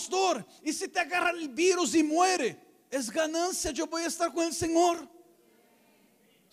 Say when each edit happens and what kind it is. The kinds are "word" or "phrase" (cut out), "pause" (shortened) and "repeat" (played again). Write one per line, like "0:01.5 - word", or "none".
none